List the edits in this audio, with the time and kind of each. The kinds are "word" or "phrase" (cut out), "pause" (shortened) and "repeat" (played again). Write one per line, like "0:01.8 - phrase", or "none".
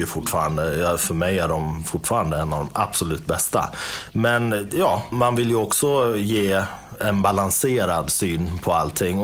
0:05.1 - word